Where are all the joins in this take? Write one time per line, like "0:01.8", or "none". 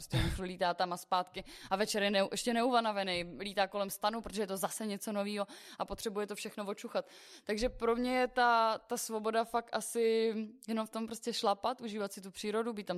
none